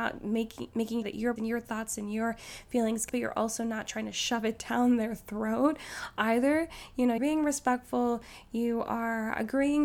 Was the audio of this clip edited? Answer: yes; 4 cuts; at 1.0 s, 1.4 s, 3.1 s, 7.2 s

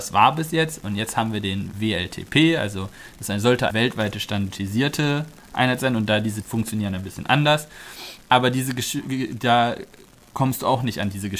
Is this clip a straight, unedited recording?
no; 3 cuts; at 1.7 s, 3.7 s, 6.4 s

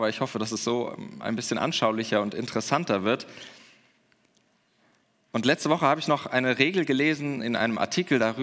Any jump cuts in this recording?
no; 0 cuts

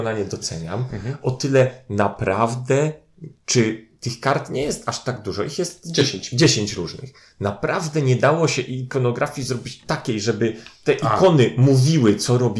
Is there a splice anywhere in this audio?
no; 0 cuts

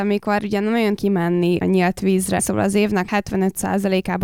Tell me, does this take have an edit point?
yes; 4 cuts; at 1.0 s, 1.6 s, 2.4 s, 3.1 s

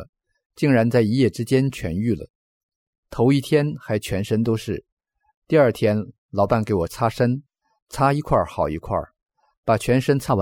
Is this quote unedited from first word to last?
yes; 0 cuts

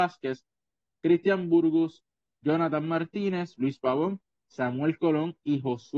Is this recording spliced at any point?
no; 0 cuts

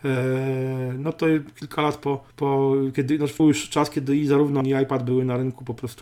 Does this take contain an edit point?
yes; 3 cuts; at 2.3 s, 3.4 s, 4.6 s

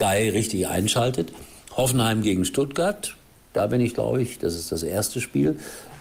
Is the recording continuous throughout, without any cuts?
yes; 0 cuts

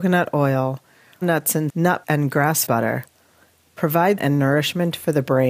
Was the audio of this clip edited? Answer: yes; 5 cuts; at 1.2 s, 1.7 s, 2.0 s, 2.7 s, 4.2 s

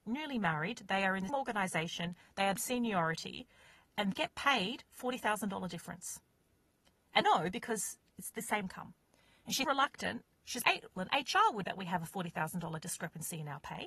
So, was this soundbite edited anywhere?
yes; 9 cuts; at 1.3 s, 2.6 s, 4.1 s, 7.2 s, 8.6 s, 9.6 s, 10.6 s, 11.0 s, 11.6 s

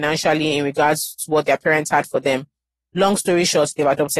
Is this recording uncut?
yes; 0 cuts

